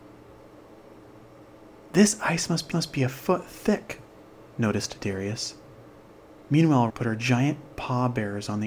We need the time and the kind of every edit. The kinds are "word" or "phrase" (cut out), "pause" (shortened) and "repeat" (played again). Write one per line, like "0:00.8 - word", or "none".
0:02.7 - repeat
0:06.9 - word